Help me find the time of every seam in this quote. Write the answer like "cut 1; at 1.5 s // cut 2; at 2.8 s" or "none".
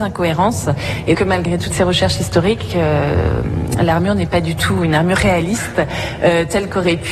cut 1; at 1.1 s